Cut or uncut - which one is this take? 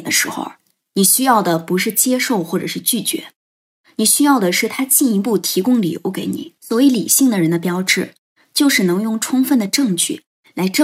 cut